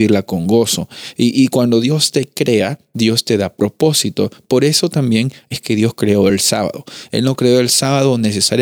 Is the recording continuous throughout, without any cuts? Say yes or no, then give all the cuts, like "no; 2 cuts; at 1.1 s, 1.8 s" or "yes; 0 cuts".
yes; 0 cuts